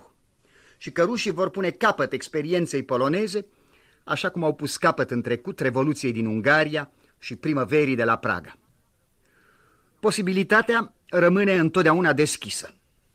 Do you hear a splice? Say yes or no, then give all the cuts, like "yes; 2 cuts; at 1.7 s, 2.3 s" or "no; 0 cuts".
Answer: no; 0 cuts